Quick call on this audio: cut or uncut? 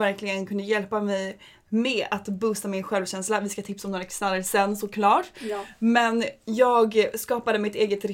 uncut